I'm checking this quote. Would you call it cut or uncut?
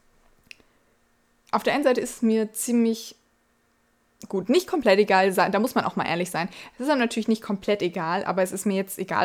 uncut